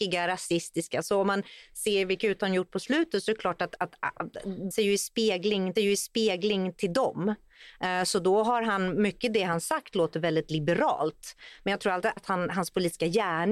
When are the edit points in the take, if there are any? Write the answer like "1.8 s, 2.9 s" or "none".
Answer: 3.8 s, 4.7 s, 5.8 s, 12.2 s